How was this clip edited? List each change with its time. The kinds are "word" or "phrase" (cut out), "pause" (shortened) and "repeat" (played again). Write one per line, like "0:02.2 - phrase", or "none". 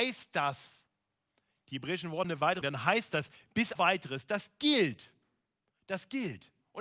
0:02.2 - word
0:02.6 - word
0:03.8 - word